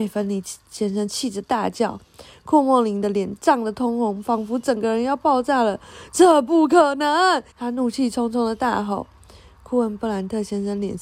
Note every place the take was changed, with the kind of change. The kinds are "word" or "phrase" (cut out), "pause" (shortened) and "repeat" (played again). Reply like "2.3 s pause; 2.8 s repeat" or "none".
7.5 s pause